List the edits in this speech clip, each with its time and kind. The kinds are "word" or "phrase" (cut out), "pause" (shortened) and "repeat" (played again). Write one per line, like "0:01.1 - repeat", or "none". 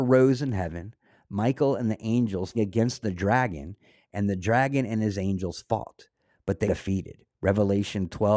0:02.5 - word
0:06.6 - word